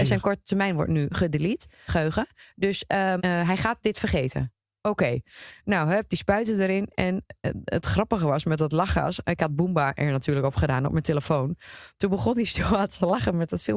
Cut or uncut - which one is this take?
cut